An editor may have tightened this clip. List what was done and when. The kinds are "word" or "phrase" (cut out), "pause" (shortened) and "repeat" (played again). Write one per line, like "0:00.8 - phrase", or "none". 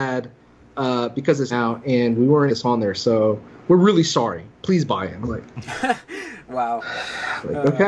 0:01.5 - phrase
0:02.5 - phrase
0:05.2 - word